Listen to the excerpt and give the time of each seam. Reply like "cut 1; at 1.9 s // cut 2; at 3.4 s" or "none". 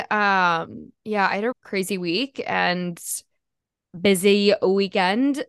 cut 1; at 1.5 s